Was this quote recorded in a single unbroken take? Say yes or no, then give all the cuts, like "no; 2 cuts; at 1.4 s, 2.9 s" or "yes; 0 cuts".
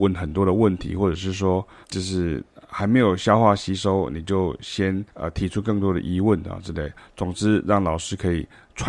no; 2 cuts; at 1.8 s, 5.1 s